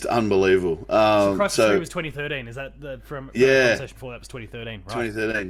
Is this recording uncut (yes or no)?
yes